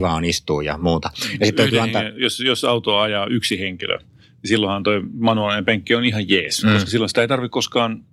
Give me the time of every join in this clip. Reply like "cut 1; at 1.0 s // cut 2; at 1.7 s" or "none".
none